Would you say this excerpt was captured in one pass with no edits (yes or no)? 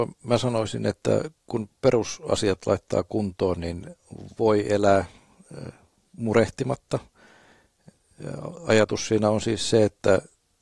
yes